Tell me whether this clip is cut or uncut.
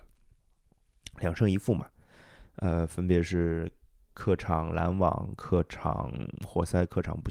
uncut